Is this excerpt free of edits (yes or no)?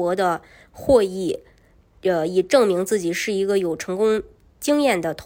yes